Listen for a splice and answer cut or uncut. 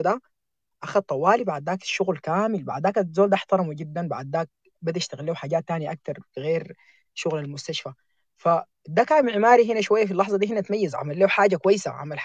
uncut